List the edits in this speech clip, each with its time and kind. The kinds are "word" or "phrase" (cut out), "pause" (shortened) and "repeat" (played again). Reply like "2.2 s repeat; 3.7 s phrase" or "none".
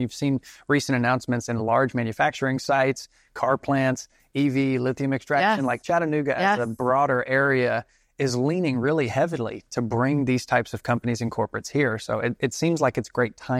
none

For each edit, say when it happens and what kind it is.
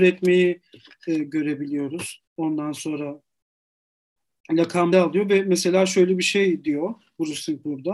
2.3 s pause; 4.9 s phrase

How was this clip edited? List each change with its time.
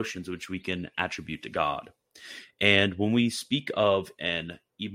none

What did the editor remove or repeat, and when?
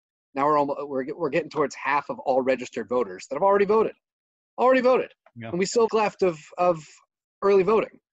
5.9 s word

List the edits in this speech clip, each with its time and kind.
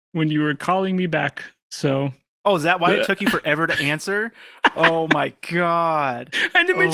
none

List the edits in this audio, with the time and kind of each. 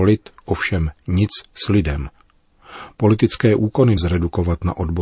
4.0 s word

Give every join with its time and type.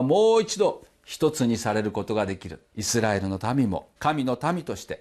2.7 s pause; 4.0 s pause

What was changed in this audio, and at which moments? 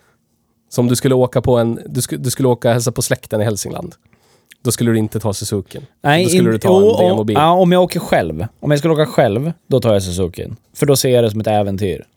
8.5 s pause; 9.6 s pause; 10.6 s pause

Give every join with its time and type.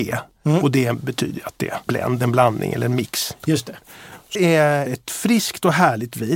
1.9 s word; 4.4 s phrase; 4.9 s phrase

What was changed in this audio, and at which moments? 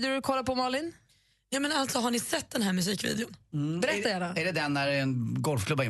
none

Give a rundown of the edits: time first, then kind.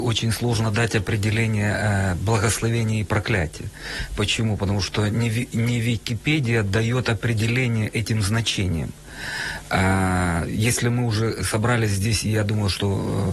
none

